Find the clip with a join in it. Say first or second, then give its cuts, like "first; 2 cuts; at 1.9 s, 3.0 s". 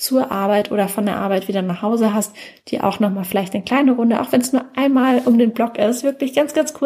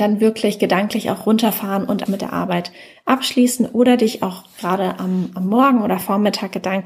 second; 1 cut; at 2.1 s